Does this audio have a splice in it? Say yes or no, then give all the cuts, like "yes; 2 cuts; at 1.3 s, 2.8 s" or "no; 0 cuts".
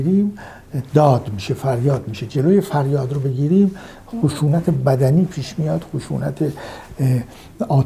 no; 0 cuts